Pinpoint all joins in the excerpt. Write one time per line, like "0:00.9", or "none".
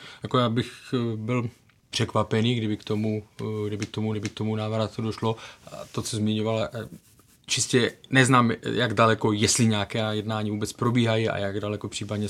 0:04.1